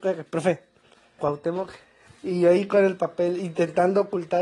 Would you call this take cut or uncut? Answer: cut